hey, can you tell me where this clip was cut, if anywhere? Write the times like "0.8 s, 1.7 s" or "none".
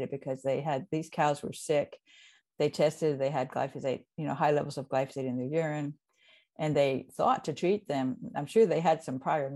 none